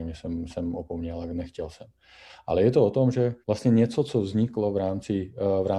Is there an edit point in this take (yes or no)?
yes